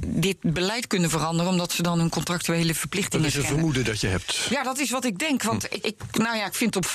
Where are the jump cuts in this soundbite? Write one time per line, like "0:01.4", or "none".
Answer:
0:05.8